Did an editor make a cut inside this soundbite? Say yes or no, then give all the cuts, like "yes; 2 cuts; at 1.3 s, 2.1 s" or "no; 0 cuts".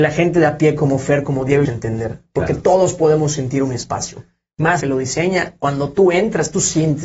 yes; 2 cuts; at 1.7 s, 4.8 s